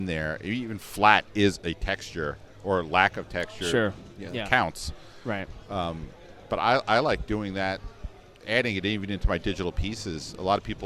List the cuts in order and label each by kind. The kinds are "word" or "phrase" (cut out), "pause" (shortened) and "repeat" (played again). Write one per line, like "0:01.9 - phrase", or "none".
none